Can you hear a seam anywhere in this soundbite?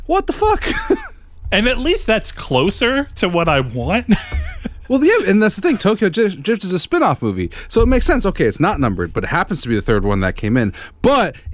no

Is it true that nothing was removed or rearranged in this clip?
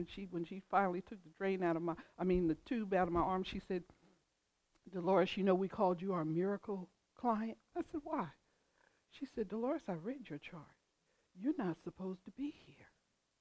yes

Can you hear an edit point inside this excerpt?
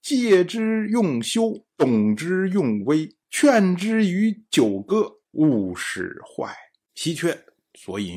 yes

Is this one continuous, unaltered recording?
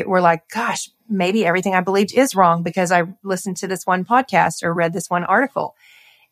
yes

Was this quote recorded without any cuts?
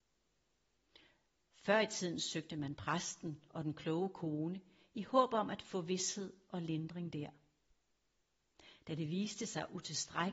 yes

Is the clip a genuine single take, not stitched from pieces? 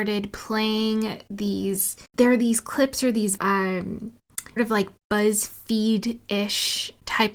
no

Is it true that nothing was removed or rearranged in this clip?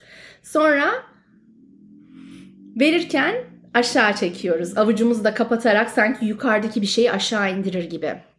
yes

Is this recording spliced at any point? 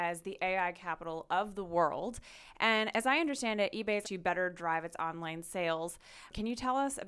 yes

